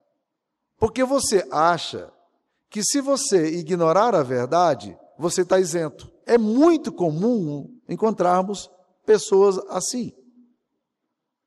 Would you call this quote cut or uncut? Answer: cut